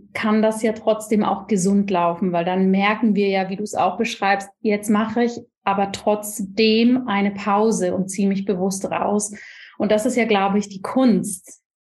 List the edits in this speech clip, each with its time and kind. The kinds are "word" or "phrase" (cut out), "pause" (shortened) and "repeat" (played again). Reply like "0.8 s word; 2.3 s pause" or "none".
none